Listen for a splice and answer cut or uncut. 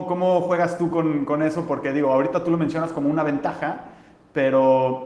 uncut